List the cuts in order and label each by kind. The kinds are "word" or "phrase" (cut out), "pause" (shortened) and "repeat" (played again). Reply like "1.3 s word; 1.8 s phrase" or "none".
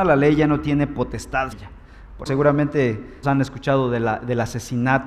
1.5 s word; 2.3 s word; 3.2 s word